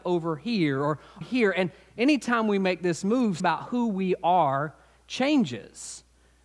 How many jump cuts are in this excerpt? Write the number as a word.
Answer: two